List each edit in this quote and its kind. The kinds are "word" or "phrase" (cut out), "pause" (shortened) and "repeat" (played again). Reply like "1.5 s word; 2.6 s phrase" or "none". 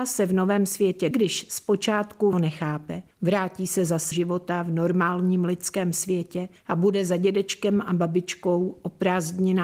1.1 s phrase; 2.3 s word; 3.1 s pause; 4.1 s phrase